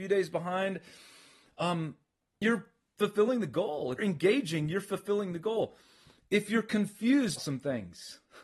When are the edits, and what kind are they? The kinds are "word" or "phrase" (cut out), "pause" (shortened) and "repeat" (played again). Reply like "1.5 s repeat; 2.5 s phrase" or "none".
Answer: 2.4 s word; 4.0 s word; 7.4 s word